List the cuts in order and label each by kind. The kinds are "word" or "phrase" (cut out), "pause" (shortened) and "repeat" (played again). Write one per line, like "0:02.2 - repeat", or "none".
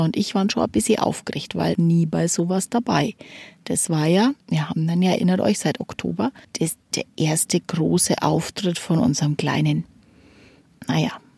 0:01.7 - phrase
0:04.4 - pause
0:05.2 - phrase
0:06.4 - pause